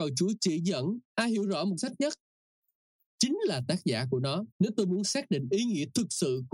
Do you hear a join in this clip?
yes; 3 cuts; at 1.0 s, 1.8 s, 4.5 s

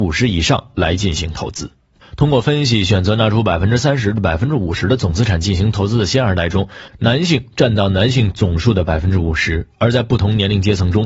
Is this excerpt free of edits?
yes; 0 cuts

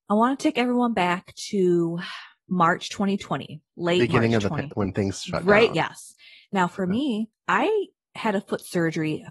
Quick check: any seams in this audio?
yes; 2 cuts; at 4.7 s, 5.7 s

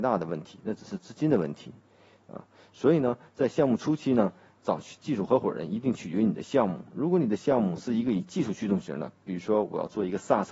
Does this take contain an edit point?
no; 0 cuts

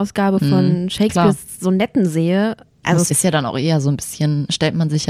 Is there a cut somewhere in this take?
yes; 1 cut; at 3.1 s

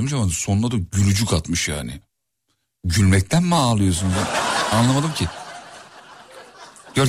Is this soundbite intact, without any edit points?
yes; 0 cuts

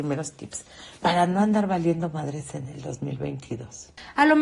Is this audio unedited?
yes; 0 cuts

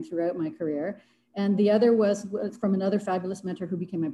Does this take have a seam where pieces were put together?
no; 0 cuts

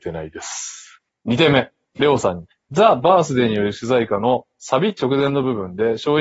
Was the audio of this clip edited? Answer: yes; 3 cuts; at 1.1 s, 1.8 s, 2.5 s

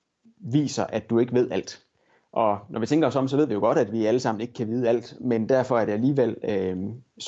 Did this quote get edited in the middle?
no; 0 cuts

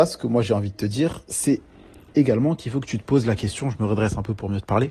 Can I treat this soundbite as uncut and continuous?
yes; 0 cuts

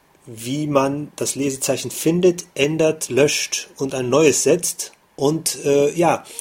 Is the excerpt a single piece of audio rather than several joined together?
no; 1 cut; at 5.1 s

